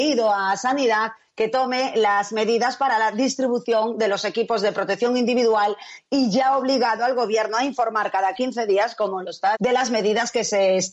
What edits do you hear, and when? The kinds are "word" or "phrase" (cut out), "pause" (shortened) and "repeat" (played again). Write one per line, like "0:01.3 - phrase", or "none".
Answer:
0:09.5 - word